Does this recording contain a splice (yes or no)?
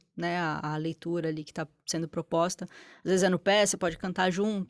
no